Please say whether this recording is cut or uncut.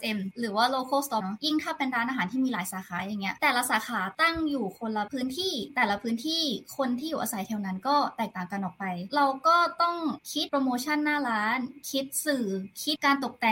cut